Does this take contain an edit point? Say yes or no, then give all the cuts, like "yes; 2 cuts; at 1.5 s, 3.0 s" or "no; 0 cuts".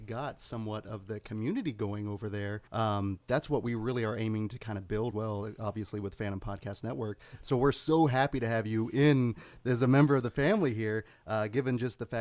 yes; 2 cuts; at 2.7 s, 5.1 s